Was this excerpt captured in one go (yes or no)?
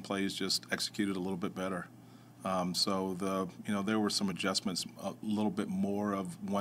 yes